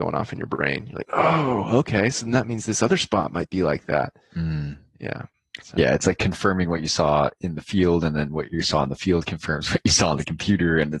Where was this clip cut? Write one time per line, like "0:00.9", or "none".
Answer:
none